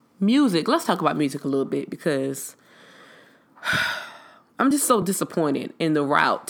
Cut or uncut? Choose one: uncut